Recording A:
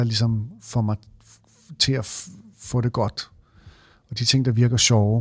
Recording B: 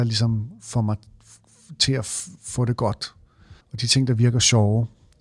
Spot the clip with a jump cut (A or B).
B